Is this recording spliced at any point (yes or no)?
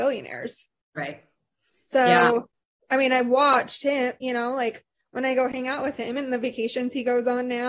no